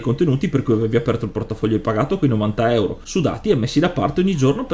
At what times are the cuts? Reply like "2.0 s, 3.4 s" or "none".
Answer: none